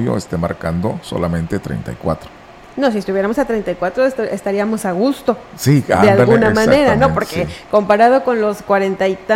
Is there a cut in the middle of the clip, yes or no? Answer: no